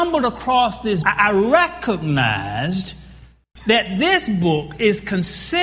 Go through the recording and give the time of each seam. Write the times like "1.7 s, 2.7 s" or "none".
1.0 s